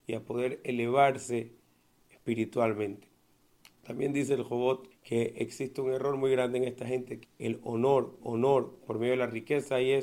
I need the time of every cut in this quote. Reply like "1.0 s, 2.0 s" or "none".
3.6 s, 4.9 s, 7.2 s, 8.2 s